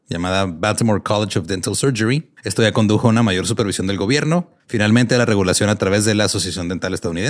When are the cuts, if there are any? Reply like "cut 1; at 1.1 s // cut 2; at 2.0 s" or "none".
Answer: cut 1; at 2.4 s // cut 2; at 4.6 s